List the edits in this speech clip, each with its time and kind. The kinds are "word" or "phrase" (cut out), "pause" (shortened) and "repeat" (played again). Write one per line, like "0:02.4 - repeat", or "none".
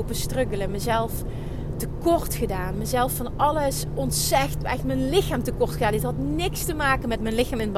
none